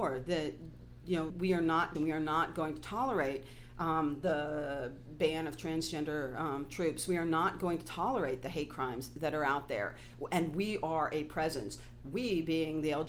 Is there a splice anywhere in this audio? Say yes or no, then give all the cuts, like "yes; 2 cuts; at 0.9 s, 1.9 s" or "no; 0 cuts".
yes; 2 cuts; at 1.3 s, 1.9 s